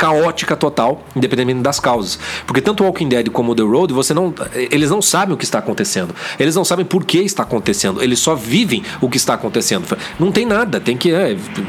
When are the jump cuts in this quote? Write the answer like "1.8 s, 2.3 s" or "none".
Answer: none